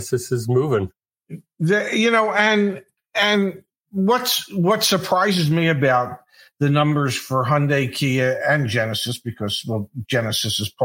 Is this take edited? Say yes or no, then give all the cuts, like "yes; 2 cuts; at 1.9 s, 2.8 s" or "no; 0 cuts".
no; 0 cuts